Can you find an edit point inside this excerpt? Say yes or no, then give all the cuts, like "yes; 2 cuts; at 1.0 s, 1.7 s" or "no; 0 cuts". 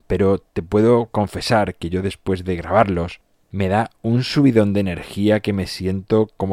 no; 0 cuts